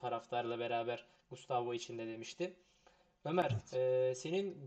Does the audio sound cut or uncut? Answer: uncut